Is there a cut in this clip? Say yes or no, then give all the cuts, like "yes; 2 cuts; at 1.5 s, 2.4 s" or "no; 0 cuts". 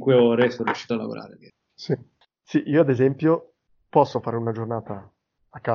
no; 0 cuts